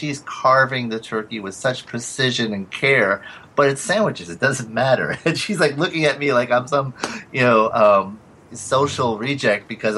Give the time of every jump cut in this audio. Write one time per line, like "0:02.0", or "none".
none